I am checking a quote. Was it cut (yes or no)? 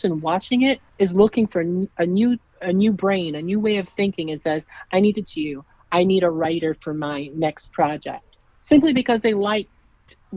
yes